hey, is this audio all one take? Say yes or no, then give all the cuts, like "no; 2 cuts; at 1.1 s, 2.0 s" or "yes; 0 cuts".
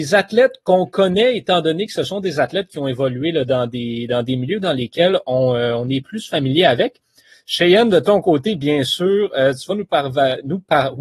yes; 0 cuts